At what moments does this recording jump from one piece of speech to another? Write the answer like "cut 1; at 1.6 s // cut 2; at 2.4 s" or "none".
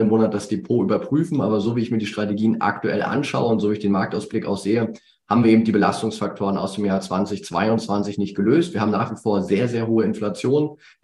none